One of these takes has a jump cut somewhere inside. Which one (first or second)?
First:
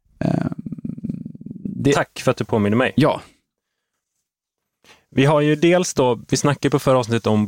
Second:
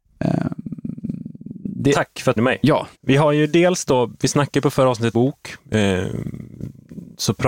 second